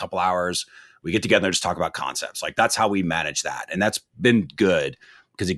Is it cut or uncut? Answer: uncut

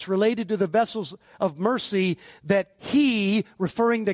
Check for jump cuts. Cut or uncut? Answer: uncut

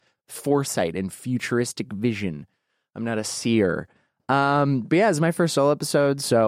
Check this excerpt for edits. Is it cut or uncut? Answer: uncut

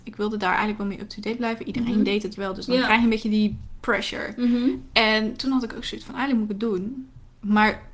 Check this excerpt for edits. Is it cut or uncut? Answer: cut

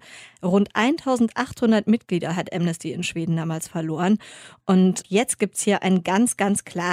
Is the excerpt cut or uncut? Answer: cut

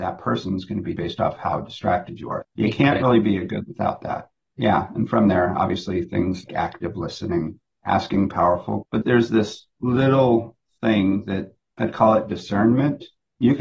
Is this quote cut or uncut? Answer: cut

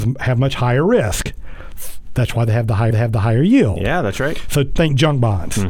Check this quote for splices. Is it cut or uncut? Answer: cut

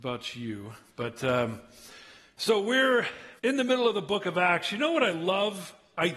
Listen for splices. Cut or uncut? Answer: cut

